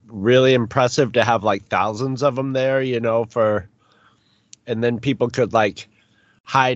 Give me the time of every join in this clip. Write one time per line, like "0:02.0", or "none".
none